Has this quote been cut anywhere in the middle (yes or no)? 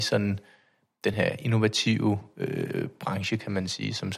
no